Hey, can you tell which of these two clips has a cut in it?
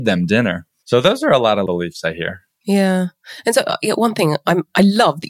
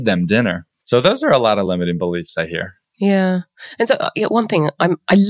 first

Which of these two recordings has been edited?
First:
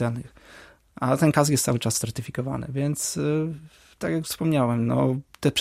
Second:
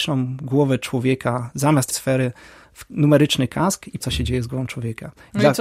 second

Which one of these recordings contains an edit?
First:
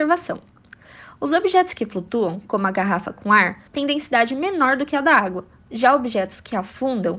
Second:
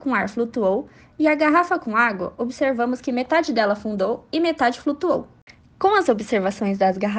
first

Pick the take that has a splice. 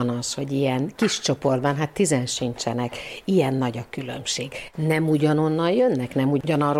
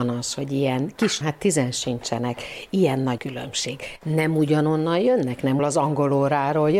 second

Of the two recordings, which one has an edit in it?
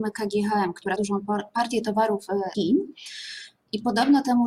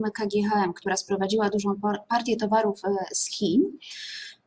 first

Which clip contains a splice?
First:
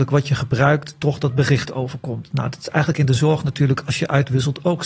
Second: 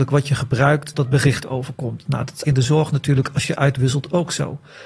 second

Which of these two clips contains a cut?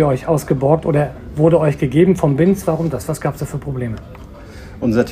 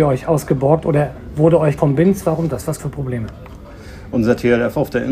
second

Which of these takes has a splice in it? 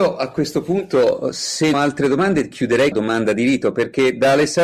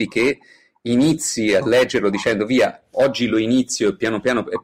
first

